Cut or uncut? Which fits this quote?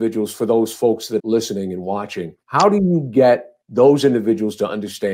cut